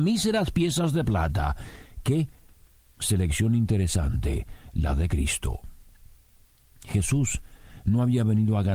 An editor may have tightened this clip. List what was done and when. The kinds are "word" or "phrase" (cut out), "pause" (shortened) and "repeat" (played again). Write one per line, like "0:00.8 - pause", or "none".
none

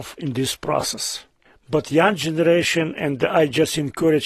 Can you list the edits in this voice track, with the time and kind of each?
0:01.5 - pause

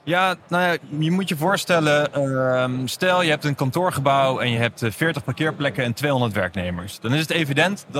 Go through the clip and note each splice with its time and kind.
none

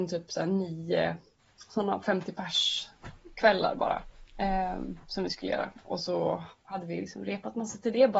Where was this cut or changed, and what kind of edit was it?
0:06.6 - pause

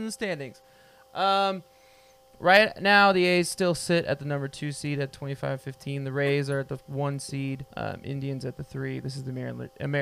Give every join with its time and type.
0:07.7 - pause

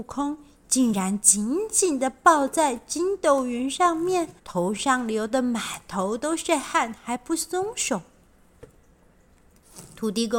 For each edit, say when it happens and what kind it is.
0:04.4 - pause

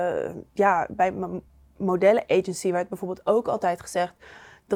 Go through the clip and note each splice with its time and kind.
none

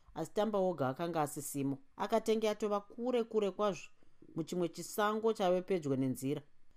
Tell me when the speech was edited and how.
0:01.9 - pause

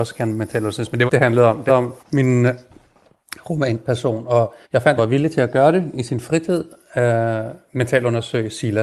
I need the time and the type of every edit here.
0:01.1 - phrase
0:01.7 - word
0:02.0 - pause
0:04.6 - pause
0:05.0 - phrase

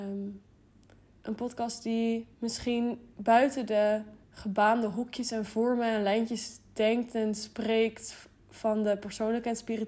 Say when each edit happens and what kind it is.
0:02.3 - pause
0:04.2 - pause

